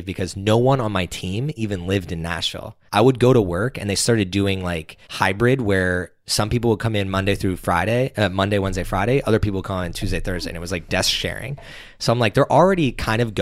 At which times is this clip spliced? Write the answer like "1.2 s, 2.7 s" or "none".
2.9 s, 5.0 s